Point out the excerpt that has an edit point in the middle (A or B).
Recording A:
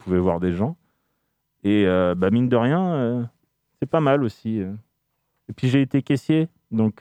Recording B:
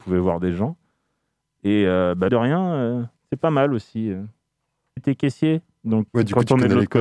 B